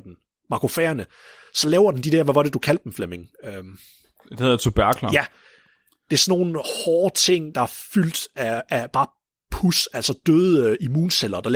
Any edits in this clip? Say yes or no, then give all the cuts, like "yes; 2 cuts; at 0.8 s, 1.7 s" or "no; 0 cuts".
no; 0 cuts